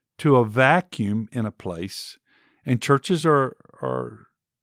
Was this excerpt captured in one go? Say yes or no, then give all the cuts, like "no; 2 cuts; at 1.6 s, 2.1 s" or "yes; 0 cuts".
yes; 0 cuts